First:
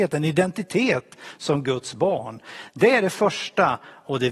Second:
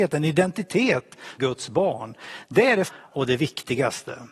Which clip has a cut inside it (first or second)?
second